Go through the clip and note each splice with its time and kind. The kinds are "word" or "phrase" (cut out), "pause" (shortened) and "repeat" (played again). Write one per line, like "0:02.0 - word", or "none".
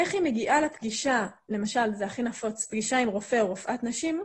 none